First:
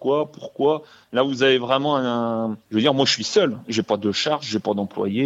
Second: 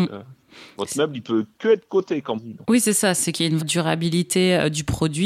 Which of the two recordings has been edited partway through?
second; 3 cuts; at 1.9 s, 2.3 s, 3.6 s

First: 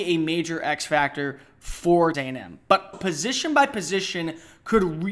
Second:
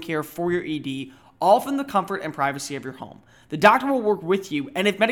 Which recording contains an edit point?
first; 2 cuts; at 2.1 s, 2.9 s

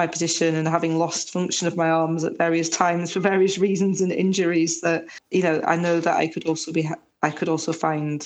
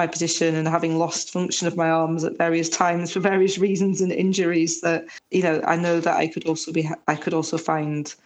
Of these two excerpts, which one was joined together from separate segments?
second; 1 cut; at 7.0 s

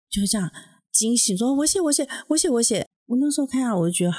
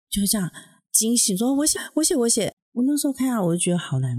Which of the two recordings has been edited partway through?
second; 1 cut; at 1.7 s

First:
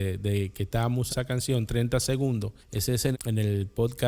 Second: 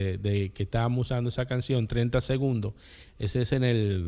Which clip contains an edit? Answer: first; 3 cuts; at 1.1 s, 2.6 s, 3.1 s

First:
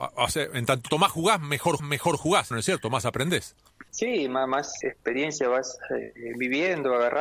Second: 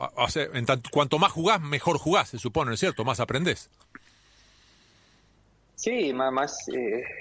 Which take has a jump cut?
first; 5 cuts; at 0.9 s, 1.8 s, 2.5 s, 3.9 s, 4.8 s

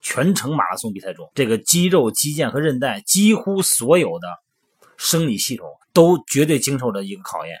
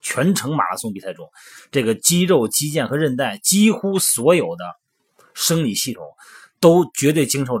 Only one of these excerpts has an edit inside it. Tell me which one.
first; 2 cuts; at 1.3 s, 5.8 s

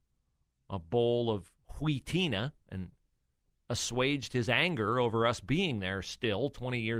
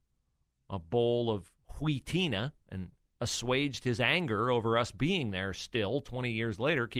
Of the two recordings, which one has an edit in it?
second; 1 cut; at 3.1 s

